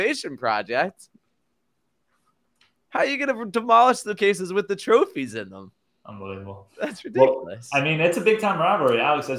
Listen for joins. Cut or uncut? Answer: cut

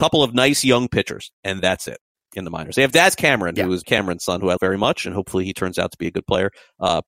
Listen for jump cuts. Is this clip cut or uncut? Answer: cut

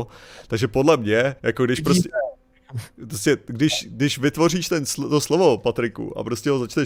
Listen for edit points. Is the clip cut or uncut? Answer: cut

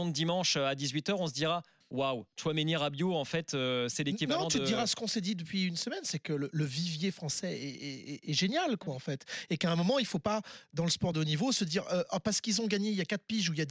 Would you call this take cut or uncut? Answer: uncut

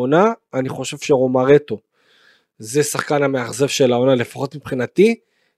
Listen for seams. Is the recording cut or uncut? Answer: uncut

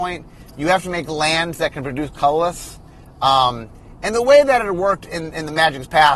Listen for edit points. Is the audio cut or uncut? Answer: uncut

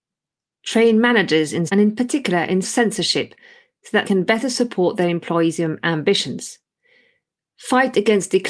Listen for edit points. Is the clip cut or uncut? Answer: cut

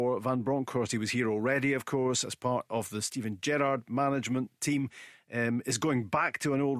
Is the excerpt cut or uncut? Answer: uncut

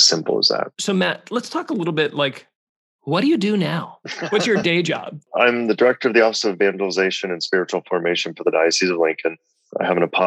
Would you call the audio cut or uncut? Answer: uncut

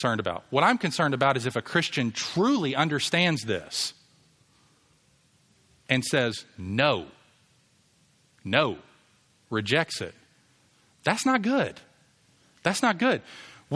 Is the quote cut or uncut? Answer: uncut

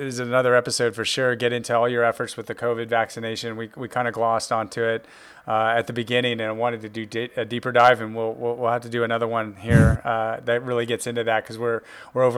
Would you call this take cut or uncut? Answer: uncut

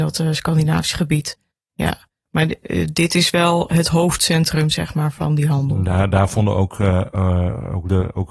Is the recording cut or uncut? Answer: uncut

